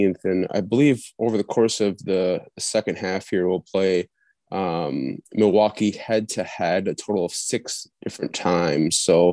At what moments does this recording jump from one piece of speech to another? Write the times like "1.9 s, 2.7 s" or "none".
none